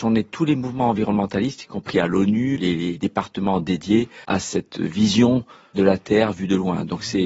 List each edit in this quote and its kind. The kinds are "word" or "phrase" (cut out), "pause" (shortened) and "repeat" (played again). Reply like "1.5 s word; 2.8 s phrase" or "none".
2.6 s word; 3.0 s word; 4.2 s pause; 5.7 s word